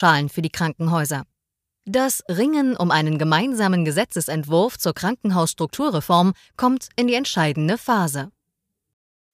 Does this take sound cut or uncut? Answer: uncut